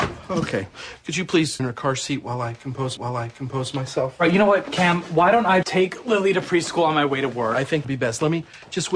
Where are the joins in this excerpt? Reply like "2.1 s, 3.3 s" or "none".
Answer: 1.6 s, 3.0 s, 5.6 s, 7.8 s